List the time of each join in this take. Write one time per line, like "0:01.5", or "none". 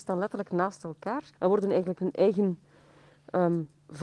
0:01.3
0:02.0